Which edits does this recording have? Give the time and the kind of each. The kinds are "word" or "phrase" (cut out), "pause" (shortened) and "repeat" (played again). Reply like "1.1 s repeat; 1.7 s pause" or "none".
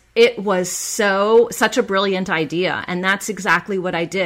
none